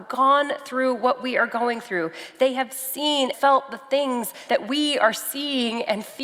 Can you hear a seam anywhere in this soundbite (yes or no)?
yes